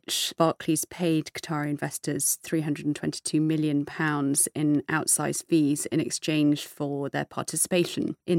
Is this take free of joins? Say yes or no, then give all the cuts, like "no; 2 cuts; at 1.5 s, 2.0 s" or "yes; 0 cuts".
yes; 0 cuts